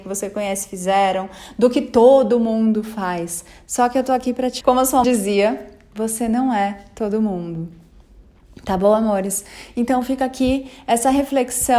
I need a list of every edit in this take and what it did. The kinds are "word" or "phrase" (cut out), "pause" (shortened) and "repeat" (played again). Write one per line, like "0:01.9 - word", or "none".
0:04.6 - word
0:05.0 - word